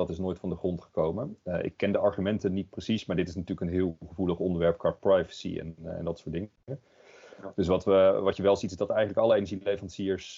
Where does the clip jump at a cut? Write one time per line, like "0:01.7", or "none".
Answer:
none